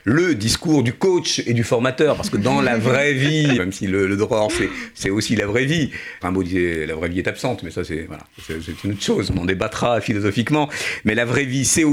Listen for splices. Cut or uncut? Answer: cut